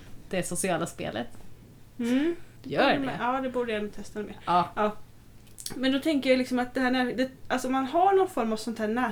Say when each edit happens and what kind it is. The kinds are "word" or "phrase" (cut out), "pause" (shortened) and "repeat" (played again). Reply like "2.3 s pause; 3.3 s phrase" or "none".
2.6 s pause; 7.4 s pause